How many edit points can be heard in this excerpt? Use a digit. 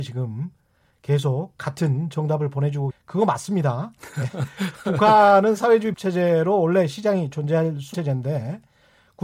3